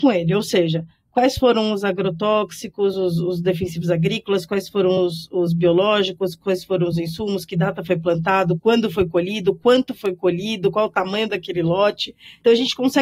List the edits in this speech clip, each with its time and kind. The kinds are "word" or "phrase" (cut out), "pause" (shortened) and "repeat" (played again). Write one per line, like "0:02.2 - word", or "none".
none